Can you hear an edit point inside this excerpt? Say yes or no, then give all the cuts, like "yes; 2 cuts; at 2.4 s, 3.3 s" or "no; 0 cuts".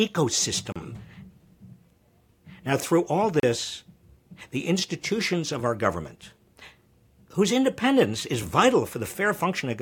no; 0 cuts